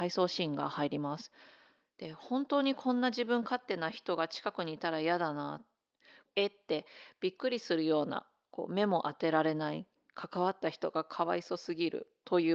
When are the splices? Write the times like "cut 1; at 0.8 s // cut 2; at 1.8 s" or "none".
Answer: none

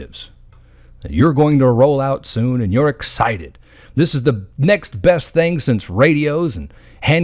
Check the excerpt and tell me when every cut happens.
cut 1; at 4.5 s

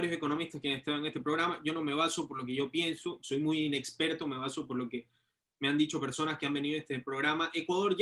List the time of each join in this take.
none

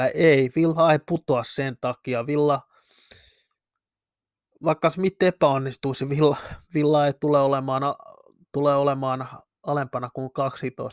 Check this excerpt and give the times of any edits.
none

